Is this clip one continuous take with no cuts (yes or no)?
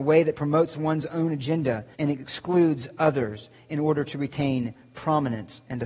no